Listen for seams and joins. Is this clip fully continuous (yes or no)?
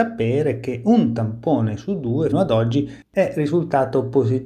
no